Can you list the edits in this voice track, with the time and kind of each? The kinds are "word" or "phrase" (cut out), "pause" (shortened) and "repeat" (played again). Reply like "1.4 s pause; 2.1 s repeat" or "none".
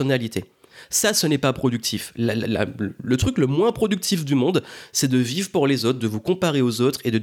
none